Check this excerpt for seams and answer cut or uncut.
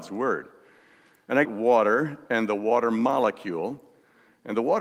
cut